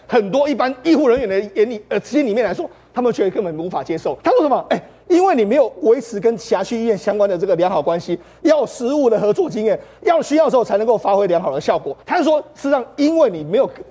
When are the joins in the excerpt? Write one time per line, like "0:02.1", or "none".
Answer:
0:04.2
0:12.0